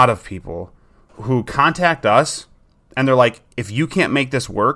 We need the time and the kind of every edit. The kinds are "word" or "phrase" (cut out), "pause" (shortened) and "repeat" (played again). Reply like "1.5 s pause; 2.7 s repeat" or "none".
1.1 s word